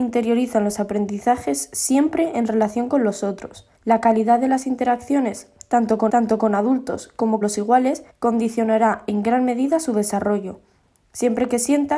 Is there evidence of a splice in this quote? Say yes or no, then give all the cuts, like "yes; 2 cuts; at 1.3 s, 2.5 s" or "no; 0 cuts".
yes; 4 cuts; at 3.8 s, 6.1 s, 7.4 s, 8.1 s